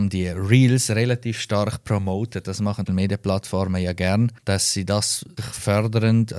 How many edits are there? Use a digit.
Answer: 3